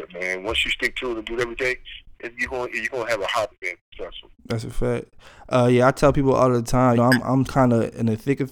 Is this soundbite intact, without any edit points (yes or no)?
no